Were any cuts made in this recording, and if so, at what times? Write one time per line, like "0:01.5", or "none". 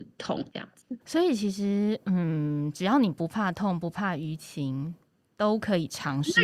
0:01.0